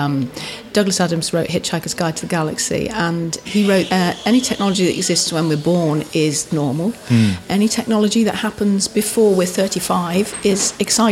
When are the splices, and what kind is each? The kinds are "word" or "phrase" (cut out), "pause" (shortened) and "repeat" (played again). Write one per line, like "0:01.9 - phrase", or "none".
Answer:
0:03.5 - word
0:03.9 - word
0:06.5 - word